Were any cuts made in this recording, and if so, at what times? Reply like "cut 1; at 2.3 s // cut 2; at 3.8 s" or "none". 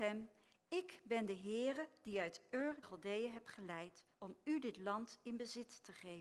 cut 1; at 2.8 s // cut 2; at 4.1 s

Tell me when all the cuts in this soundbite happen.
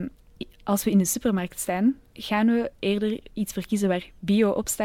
cut 1; at 2.1 s

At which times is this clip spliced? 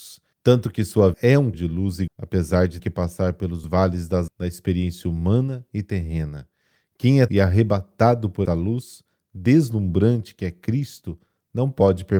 cut 1; at 1.1 s // cut 2; at 1.5 s // cut 3; at 2.1 s // cut 4; at 2.8 s // cut 5; at 3.6 s // cut 6; at 4.3 s // cut 7; at 7.3 s // cut 8; at 8.5 s

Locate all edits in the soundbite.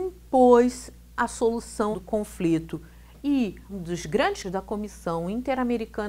cut 1; at 1.9 s // cut 2; at 3.7 s // cut 3; at 4.4 s

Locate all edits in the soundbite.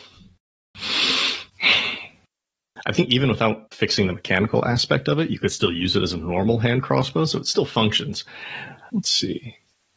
cut 1; at 1.5 s

